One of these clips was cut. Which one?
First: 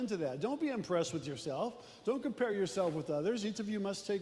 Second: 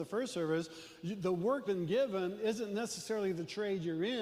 second; 1 cut; at 1.7 s

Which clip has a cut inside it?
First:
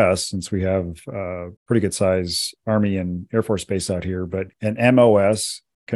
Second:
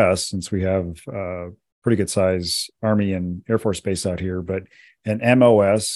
first; 2 cuts; at 1.6 s, 4.5 s

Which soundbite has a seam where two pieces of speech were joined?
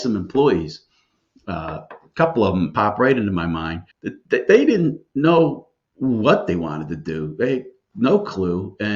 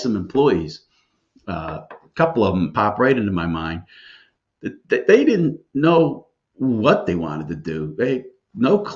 first; 1 cut; at 3.9 s

